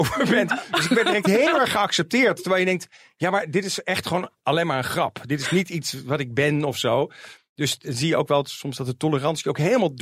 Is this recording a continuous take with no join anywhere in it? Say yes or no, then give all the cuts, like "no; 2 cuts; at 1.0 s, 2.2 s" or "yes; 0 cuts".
yes; 0 cuts